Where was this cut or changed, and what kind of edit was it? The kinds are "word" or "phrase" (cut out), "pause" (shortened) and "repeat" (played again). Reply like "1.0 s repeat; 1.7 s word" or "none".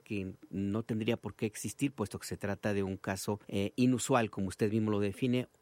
3.4 s pause